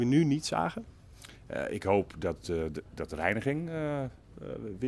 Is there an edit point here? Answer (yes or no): no